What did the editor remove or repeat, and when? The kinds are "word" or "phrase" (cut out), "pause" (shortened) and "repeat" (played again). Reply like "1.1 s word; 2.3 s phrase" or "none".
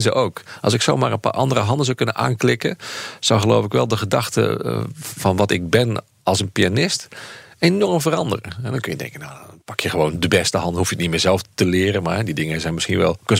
none